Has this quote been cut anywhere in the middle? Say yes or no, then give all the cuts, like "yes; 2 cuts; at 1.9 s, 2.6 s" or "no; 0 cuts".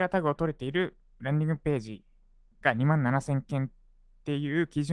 no; 0 cuts